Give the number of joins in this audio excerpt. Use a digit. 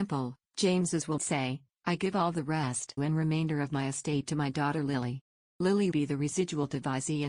3